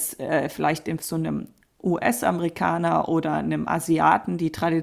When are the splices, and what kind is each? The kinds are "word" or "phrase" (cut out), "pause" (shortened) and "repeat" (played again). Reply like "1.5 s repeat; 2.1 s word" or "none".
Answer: 1.0 s word